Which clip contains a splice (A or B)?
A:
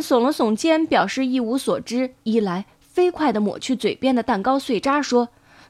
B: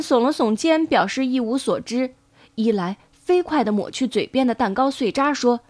A